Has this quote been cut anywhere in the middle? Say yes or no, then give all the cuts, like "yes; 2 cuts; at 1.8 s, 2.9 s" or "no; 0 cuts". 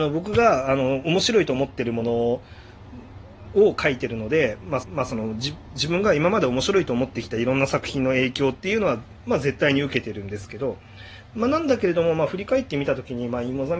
yes; 1 cut; at 4.8 s